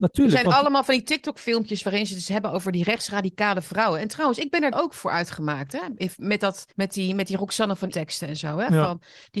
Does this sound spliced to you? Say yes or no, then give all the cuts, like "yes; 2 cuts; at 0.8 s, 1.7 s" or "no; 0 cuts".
yes; 3 cuts; at 4.7 s, 6.7 s, 7.9 s